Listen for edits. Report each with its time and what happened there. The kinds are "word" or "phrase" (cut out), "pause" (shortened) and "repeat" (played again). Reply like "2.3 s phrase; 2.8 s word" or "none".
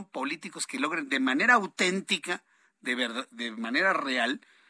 none